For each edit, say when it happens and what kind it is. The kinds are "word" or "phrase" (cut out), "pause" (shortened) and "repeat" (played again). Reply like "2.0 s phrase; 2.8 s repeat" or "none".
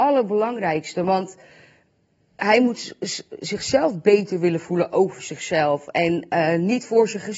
none